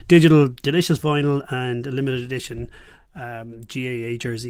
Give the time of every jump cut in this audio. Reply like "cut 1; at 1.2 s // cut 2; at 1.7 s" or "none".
none